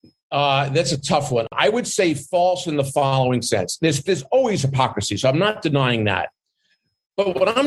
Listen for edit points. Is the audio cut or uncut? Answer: uncut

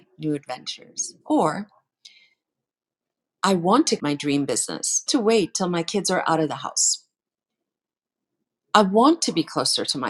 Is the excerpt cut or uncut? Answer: cut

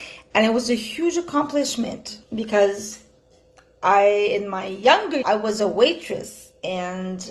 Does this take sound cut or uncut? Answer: cut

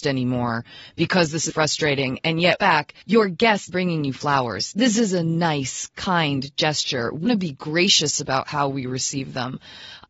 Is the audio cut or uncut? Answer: cut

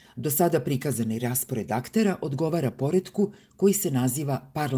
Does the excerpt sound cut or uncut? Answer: uncut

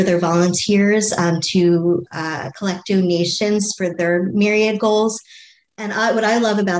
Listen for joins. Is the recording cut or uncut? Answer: uncut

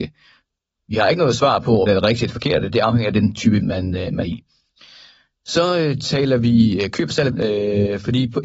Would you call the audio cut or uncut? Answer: cut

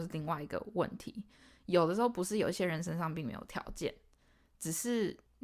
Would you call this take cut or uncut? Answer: uncut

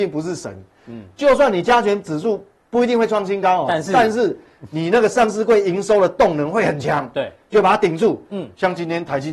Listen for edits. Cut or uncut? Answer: uncut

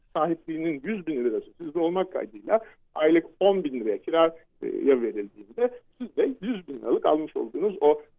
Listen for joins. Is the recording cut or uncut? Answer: uncut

